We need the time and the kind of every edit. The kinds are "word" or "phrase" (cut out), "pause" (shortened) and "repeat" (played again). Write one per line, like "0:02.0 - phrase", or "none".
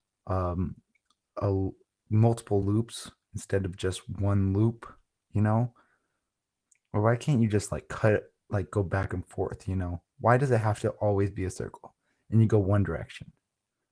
none